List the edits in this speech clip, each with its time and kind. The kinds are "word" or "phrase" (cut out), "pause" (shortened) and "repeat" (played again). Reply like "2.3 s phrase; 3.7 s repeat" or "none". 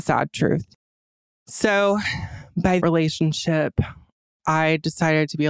2.8 s phrase